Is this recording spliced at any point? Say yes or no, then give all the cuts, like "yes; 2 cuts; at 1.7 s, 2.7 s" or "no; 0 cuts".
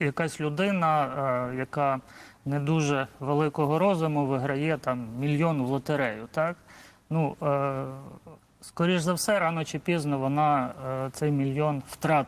no; 0 cuts